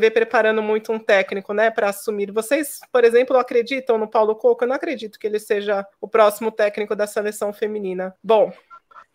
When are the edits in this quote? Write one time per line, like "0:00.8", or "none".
0:05.9
0:08.2